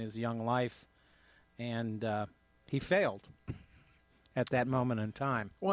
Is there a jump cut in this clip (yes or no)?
no